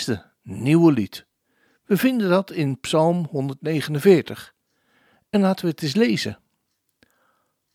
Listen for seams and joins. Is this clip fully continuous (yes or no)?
yes